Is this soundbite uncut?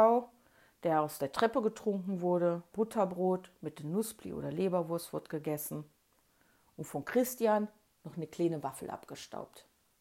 no; 1 cut; at 2.7 s

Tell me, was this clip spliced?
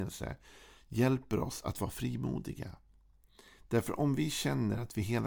no; 0 cuts

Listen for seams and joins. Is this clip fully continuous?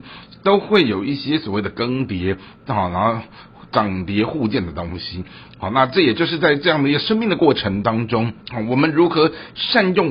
no; 1 cut; at 8.4 s

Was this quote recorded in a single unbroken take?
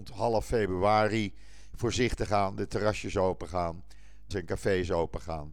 no; 1 cut; at 4.3 s

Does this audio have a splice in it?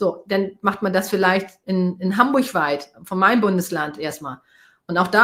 no; 0 cuts

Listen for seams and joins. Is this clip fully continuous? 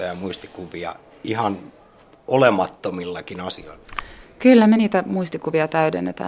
yes; 0 cuts

